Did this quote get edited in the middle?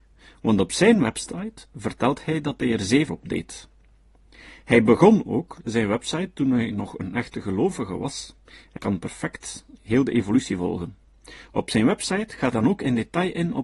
yes; 3 cuts; at 3.1 s, 8.8 s, 12.5 s

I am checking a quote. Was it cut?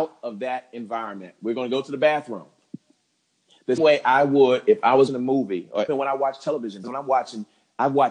yes; 4 cuts; at 3.8 s, 5.1 s, 5.9 s, 6.8 s

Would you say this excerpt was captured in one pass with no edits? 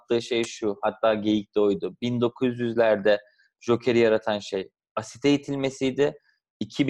yes; 0 cuts

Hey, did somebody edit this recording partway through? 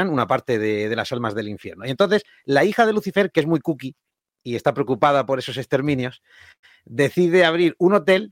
no; 0 cuts

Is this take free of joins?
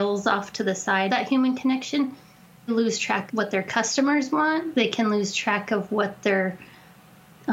no; 3 cuts; at 1.1 s, 2.7 s, 3.3 s

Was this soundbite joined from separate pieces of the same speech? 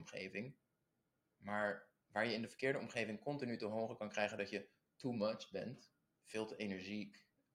yes; 1 cut; at 2.0 s

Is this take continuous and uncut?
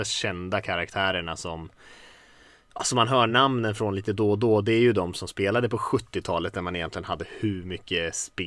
yes; 0 cuts

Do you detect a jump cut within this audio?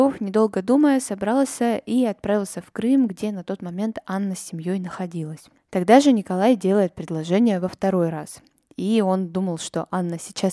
no; 0 cuts

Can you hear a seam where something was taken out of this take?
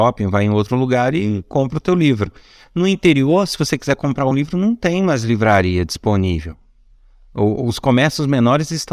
no; 0 cuts

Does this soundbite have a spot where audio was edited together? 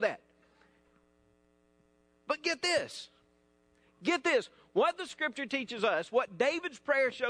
no; 0 cuts

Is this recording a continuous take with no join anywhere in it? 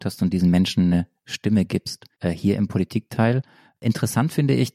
no; 1 cut; at 2.1 s

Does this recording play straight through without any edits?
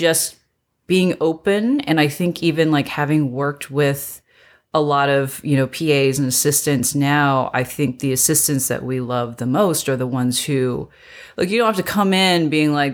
yes; 0 cuts

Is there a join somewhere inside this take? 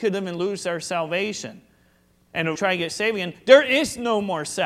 yes; 1 cut; at 2.6 s

